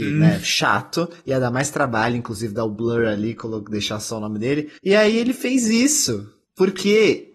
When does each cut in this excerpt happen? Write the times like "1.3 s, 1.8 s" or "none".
4.8 s, 6.4 s